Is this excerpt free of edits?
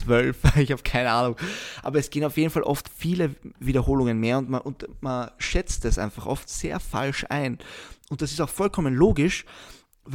yes; 0 cuts

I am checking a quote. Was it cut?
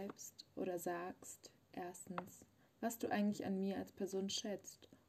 no; 0 cuts

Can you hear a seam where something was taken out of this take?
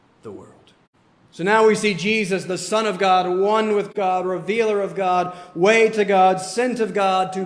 no; 0 cuts

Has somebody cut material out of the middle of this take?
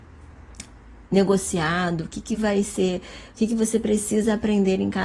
no; 0 cuts

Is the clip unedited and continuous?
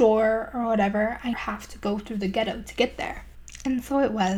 no; 1 cut; at 1.3 s

